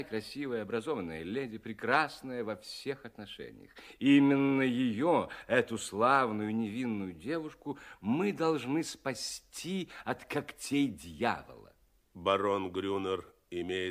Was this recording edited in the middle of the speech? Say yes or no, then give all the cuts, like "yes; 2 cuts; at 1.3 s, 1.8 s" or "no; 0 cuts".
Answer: no; 0 cuts